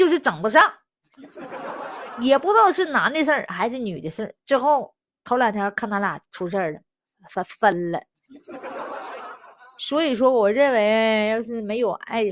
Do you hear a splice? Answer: no; 0 cuts

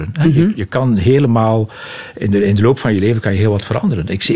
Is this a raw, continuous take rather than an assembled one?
yes; 0 cuts

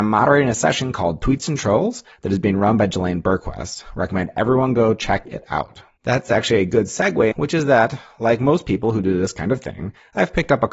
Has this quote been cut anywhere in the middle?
yes; 2 cuts; at 6.0 s, 7.3 s

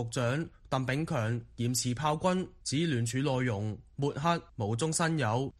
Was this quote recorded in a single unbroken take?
yes; 0 cuts

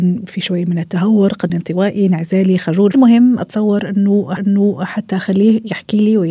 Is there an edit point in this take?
yes; 3 cuts; at 1.5 s, 2.9 s, 4.4 s

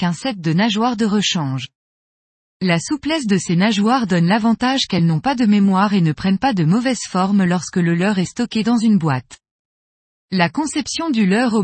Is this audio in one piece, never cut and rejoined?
yes; 0 cuts

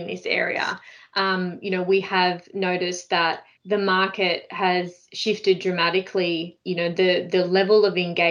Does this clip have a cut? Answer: yes; 1 cut; at 3.5 s

